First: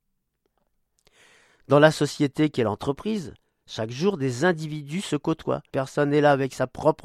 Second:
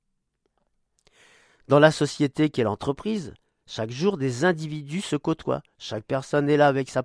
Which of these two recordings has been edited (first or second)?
first